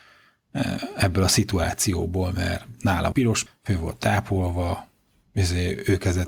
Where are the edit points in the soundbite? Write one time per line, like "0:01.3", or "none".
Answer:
0:03.1
0:03.5